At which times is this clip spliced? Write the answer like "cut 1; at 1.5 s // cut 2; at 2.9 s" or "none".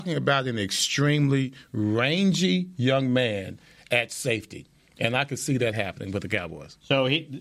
none